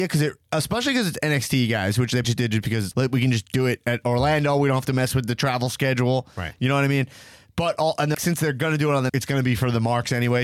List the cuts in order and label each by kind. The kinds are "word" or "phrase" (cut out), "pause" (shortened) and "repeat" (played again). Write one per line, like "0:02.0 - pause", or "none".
0:02.2 - word
0:02.9 - word
0:08.1 - word
0:09.1 - word